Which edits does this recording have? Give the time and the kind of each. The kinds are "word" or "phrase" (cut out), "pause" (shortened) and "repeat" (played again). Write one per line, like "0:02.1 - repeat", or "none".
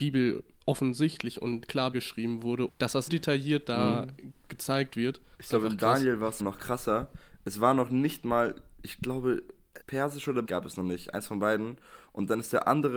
0:01.9 - phrase
0:02.7 - word
0:03.1 - word
0:06.4 - word
0:09.8 - word
0:10.4 - phrase